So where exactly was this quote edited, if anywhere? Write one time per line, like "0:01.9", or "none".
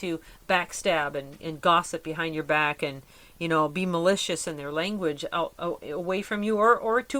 none